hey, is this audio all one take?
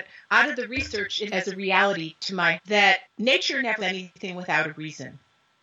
no; 4 cuts; at 1.3 s, 2.6 s, 3.0 s, 3.8 s

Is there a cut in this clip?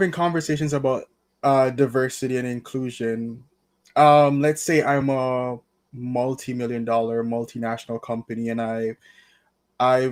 no; 0 cuts

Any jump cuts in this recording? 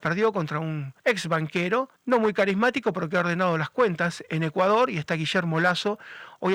yes; 2 cuts; at 1.0 s, 2.0 s

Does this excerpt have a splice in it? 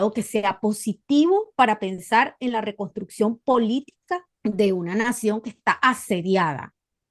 yes; 1 cut; at 4.4 s

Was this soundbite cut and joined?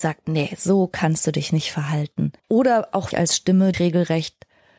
yes; 3 cuts; at 2.4 s, 3.1 s, 3.7 s

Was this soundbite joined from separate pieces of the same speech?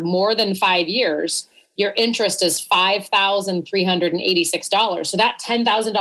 no; 0 cuts

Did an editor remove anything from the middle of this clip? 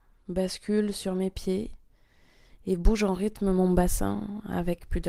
no; 0 cuts

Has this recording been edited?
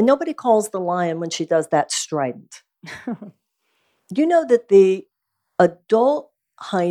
no; 0 cuts

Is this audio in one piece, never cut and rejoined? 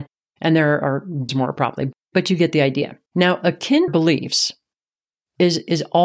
no; 3 cuts; at 1.3 s, 3.1 s, 3.9 s

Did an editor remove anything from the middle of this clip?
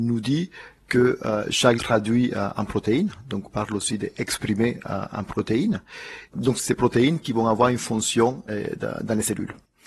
yes; 5 cuts; at 1.8 s, 3.4 s, 6.3 s, 6.6 s, 8.5 s

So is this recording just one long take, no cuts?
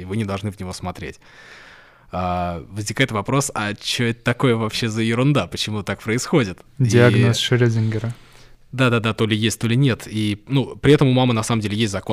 yes; 0 cuts

